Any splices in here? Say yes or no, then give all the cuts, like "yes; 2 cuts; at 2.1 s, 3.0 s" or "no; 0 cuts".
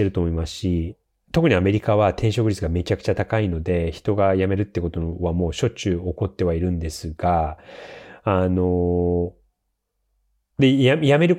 no; 0 cuts